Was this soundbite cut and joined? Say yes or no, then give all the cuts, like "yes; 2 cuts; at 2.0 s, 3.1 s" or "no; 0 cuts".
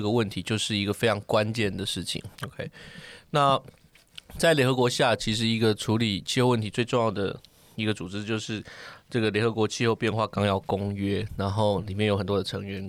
yes; 1 cut; at 2.3 s